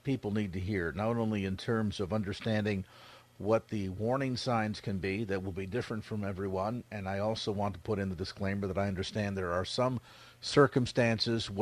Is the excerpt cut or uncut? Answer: uncut